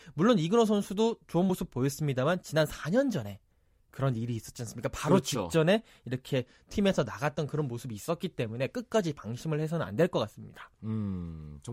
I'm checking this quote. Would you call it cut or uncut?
uncut